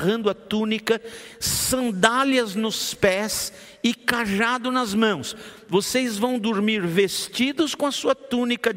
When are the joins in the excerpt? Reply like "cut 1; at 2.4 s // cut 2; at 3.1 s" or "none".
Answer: none